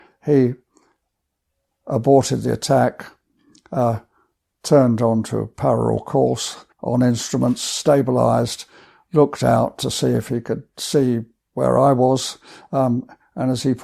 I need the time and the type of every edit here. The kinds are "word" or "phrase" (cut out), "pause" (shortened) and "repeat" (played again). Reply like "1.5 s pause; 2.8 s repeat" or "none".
6.7 s pause